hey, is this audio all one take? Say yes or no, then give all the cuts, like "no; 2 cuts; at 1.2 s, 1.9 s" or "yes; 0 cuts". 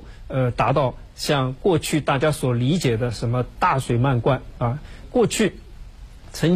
no; 1 cut; at 5.0 s